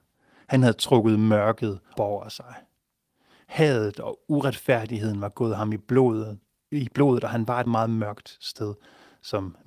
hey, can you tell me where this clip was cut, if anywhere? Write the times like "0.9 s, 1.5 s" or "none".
2.0 s, 7.7 s